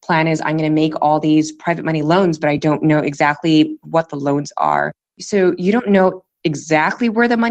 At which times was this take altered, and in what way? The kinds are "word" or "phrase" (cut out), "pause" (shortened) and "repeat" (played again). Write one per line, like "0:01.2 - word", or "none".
none